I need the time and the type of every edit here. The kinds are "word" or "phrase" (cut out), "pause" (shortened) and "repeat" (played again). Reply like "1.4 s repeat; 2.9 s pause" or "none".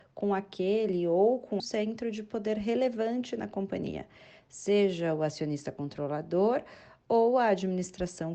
1.6 s phrase